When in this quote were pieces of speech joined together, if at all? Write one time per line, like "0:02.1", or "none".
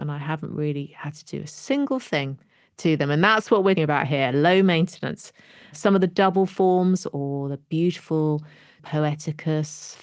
0:03.8
0:08.8

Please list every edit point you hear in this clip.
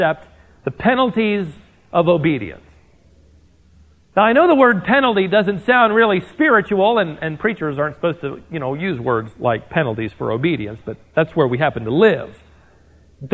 none

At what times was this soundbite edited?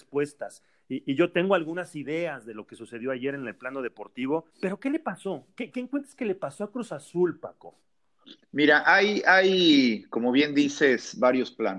0:04.5

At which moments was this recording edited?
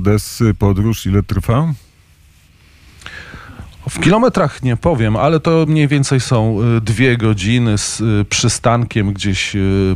none

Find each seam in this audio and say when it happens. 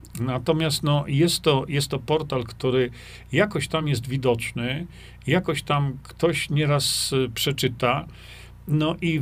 none

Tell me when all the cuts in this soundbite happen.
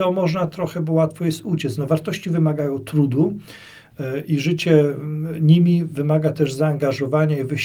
none

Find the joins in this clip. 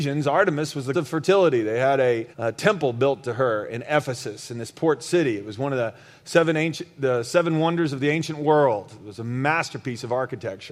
0:00.9
0:02.3

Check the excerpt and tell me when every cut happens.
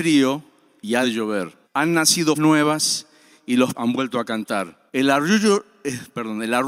0:01.0
0:01.6
0:02.3
0:03.7
0:04.9

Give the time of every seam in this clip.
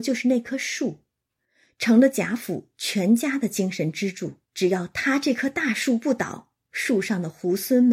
0:04.5
0:06.6

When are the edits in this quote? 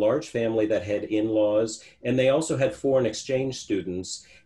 none

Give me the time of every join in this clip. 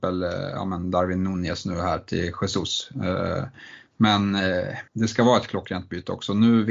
0:04.9

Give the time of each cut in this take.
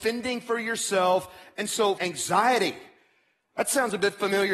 0:02.0

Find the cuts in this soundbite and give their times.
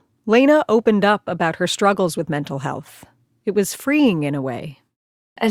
none

